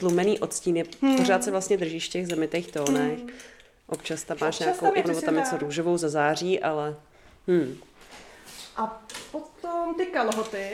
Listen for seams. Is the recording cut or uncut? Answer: cut